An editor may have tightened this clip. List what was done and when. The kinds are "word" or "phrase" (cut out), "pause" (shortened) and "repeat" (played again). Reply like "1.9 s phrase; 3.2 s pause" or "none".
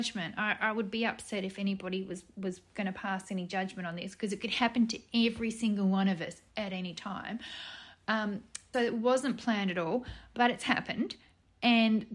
8.7 s word

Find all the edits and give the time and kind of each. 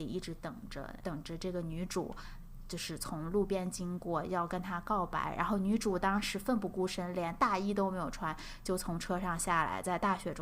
1.0 s word

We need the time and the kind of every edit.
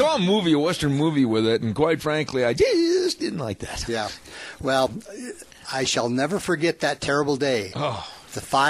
none

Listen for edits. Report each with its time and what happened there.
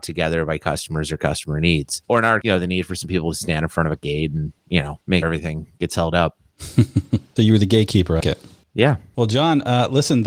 2.4 s word; 5.2 s word; 7.4 s word; 8.2 s word

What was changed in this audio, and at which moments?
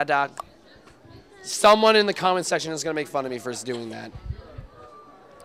none

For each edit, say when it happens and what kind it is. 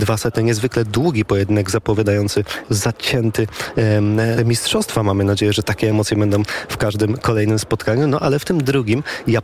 2.6 s word; 4.4 s word

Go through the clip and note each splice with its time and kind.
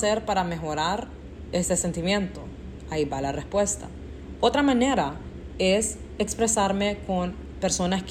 none

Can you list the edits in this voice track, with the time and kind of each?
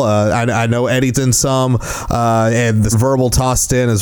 1.1 s word; 2.9 s word

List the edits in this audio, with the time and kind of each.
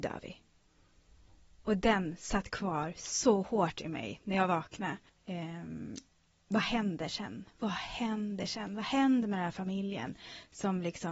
5.1 s pause

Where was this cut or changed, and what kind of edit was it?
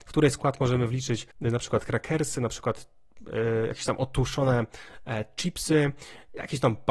1.3 s pause

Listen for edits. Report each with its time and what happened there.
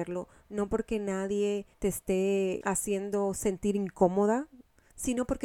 1.7 s pause; 2.6 s word

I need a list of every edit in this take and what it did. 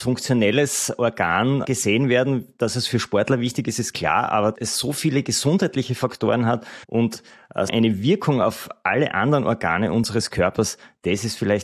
1.6 s word; 4.5 s word; 6.8 s pause; 7.7 s word

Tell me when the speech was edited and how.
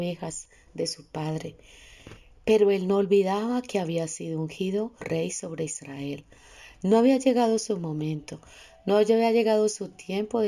5.0 s word

